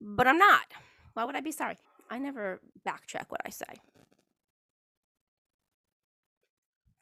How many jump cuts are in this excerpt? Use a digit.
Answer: 2